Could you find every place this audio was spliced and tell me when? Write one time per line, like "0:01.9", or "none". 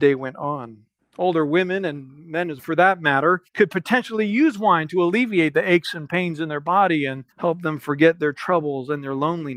0:01.0
0:02.6
0:03.5
0:07.3